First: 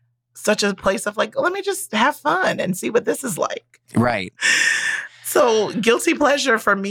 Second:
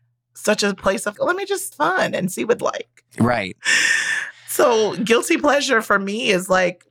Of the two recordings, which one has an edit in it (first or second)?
second